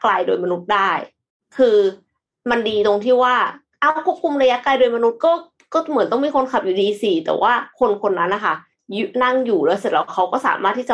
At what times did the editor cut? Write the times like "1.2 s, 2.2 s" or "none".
none